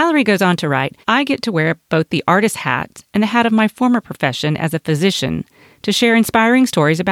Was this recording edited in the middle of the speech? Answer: yes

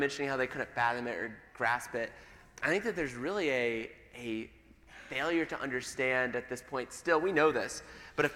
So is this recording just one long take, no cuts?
yes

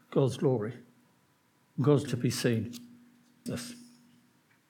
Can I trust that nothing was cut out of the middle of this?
no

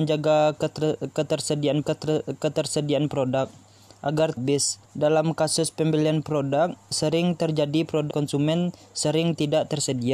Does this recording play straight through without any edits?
no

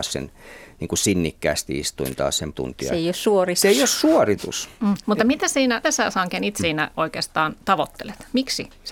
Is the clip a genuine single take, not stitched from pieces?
no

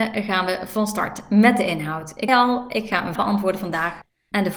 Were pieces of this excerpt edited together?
yes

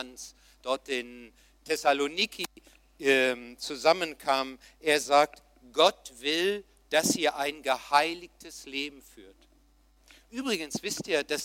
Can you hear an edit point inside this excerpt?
no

